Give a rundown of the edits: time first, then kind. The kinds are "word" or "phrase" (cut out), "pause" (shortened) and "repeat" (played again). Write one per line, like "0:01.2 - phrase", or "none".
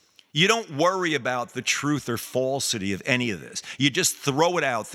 none